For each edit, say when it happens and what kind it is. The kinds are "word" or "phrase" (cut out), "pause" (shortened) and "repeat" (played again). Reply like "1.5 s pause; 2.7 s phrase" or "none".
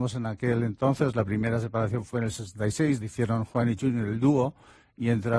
3.0 s word

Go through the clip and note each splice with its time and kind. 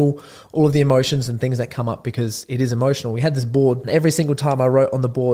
none

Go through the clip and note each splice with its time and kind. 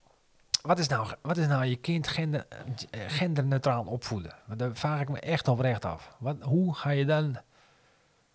none

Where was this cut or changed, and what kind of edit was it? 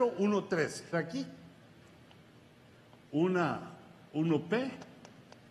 0.9 s phrase

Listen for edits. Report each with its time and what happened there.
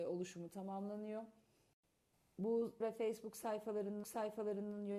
2.8 s word; 4.0 s repeat

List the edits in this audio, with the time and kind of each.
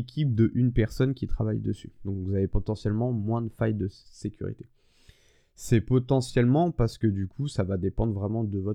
none

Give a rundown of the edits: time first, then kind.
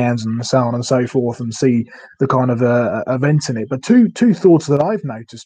none

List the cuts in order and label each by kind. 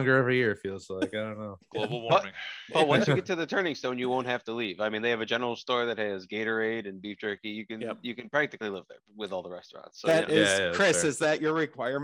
none

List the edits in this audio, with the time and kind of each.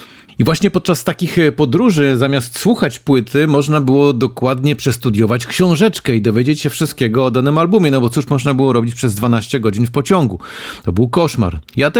none

